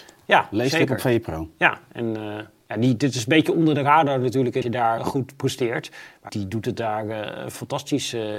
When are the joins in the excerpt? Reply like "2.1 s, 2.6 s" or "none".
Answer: 4.6 s, 5.0 s, 6.3 s